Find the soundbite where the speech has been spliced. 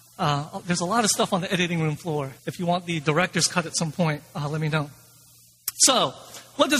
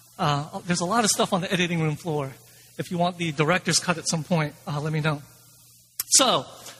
first; 1 cut; at 2.4 s

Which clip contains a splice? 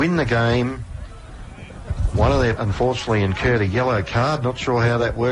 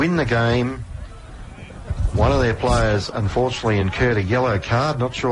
first; 1 cut; at 2.5 s

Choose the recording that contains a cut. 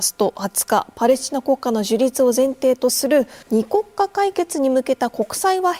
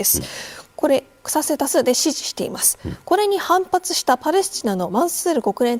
first; 1 cut; at 3.4 s

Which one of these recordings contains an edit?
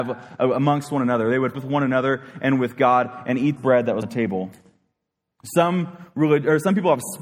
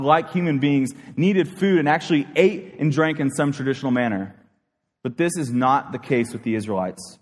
first; 3 cuts; at 1.5 s, 3.6 s, 4.0 s

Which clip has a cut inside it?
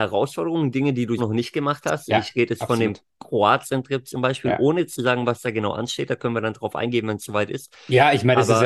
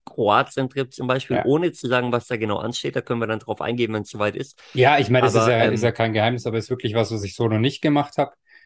first; 1 cut; at 1.2 s

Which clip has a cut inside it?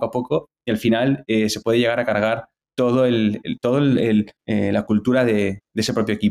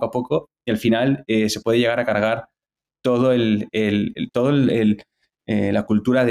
first; 3 cuts; at 2.6 s, 3.4 s, 4.4 s

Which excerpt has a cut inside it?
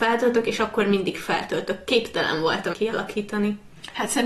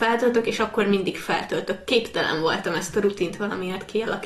first; 1 cut; at 2.7 s

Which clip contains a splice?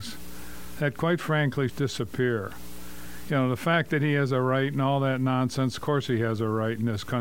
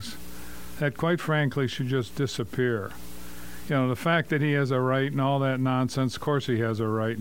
first; 1 cut; at 1.7 s

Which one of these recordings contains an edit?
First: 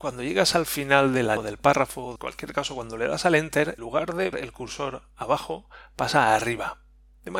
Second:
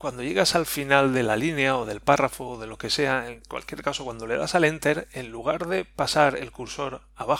first; 4 cuts; at 1.4 s, 2.2 s, 3.8 s, 4.3 s

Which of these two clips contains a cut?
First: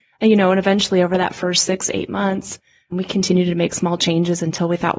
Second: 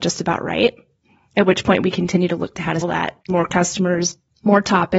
second; 2 cuts; at 2.8 s, 3.3 s

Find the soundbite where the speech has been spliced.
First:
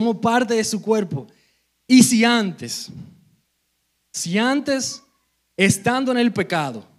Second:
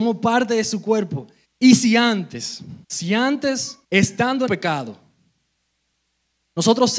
second; 4 cuts; at 1.4 s, 2.8 s, 3.8 s, 4.5 s

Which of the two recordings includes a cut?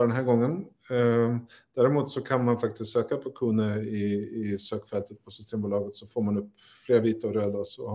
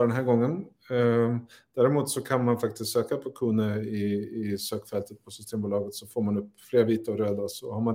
second; 1 cut; at 6.6 s

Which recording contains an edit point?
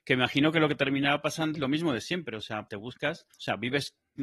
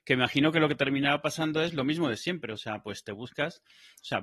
first; 3 cuts; at 1.5 s, 2.7 s, 3.3 s

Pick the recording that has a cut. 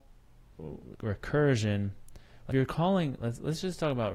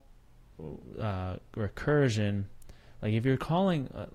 first; 3 cuts; at 0.9 s, 2.5 s, 3.2 s

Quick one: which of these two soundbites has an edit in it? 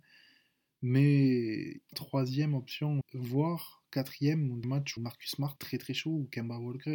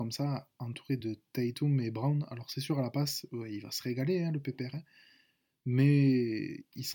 first; 5 cuts; at 1.9 s, 3.0 s, 4.6 s, 5.0 s, 5.6 s

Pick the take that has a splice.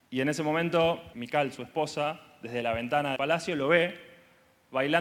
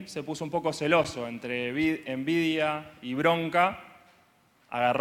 first; 2 cuts; at 1.1 s, 3.2 s

